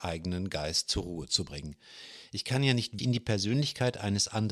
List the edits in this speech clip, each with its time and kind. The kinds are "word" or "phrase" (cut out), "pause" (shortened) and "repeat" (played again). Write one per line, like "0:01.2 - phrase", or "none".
0:03.0 - word